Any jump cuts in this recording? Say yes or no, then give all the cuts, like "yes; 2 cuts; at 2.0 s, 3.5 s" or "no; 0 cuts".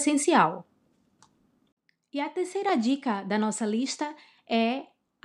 no; 0 cuts